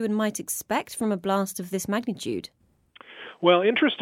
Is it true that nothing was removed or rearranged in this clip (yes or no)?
yes